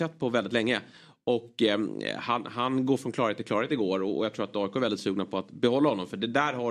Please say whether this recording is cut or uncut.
uncut